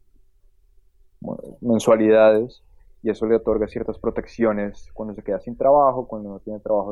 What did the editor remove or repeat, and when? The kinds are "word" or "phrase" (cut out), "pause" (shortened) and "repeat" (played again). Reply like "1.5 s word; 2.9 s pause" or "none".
none